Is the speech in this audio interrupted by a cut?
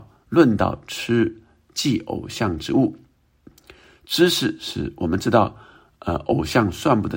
no; 0 cuts

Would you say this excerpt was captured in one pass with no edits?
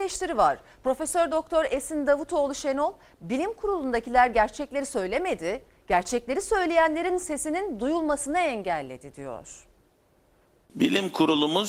yes; 0 cuts

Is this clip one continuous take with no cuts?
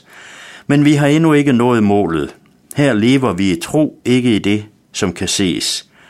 yes; 0 cuts

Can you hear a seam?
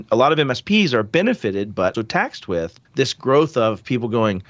yes; 2 cuts; at 1.9 s, 2.8 s

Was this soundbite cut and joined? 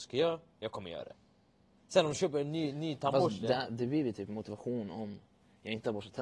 no; 0 cuts

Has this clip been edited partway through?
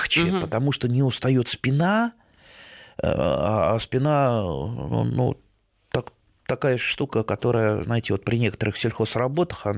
no; 0 cuts

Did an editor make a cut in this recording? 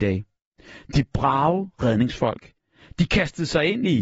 no; 0 cuts

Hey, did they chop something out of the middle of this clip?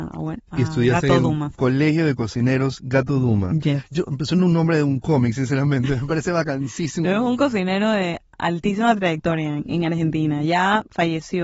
yes; 1 cut; at 9.6 s

